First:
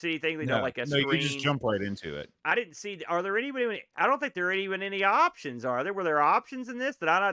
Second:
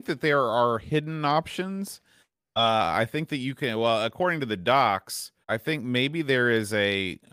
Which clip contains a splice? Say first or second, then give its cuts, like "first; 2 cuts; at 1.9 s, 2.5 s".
second; 1 cut; at 5.4 s